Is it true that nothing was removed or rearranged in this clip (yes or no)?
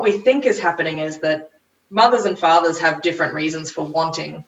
yes